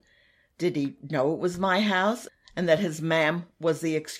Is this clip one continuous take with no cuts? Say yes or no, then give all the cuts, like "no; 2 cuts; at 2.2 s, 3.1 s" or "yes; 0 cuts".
yes; 0 cuts